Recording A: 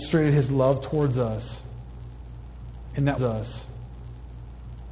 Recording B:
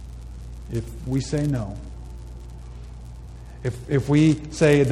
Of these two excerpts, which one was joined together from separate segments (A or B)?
A